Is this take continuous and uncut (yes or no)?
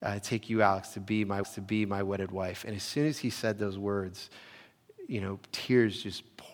no